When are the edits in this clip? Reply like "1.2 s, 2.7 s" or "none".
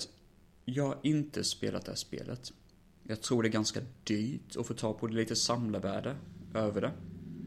none

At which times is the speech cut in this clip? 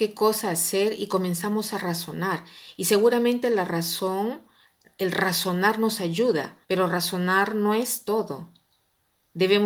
6.6 s

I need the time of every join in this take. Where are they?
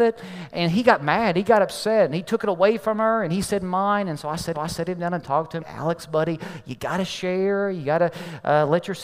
4.5 s, 5.6 s

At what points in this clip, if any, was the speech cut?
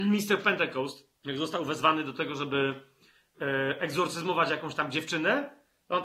1.2 s

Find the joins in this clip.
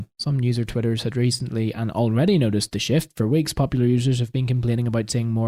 none

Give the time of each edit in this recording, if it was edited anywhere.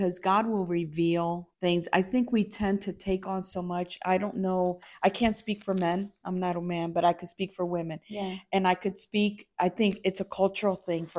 1.5 s

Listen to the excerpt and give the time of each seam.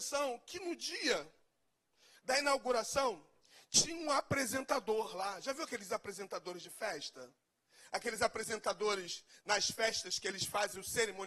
none

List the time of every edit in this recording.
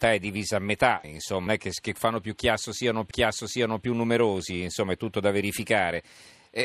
1.0 s, 1.5 s, 2.0 s, 3.1 s

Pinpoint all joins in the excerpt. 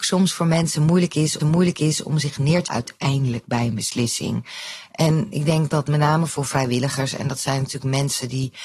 1.4 s, 2.7 s

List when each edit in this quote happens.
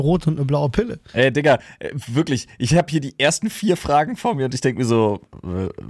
1.1 s

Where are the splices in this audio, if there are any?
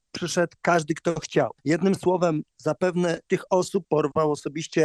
1.6 s, 3.3 s, 3.8 s

